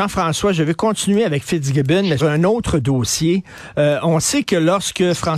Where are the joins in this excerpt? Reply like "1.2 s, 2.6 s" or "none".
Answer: 2.2 s